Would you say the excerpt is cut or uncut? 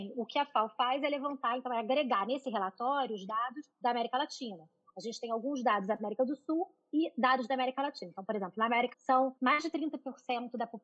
cut